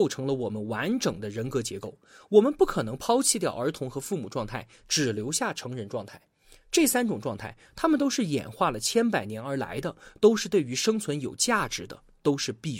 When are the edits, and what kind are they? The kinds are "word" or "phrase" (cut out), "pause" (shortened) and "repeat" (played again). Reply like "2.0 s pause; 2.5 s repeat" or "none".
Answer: none